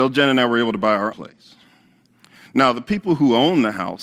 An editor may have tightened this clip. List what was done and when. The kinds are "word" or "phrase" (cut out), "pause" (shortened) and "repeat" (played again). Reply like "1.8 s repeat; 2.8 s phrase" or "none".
1.1 s word